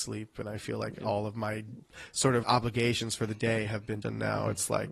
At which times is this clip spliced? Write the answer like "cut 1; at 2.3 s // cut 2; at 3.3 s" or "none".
cut 1; at 2.4 s // cut 2; at 4.0 s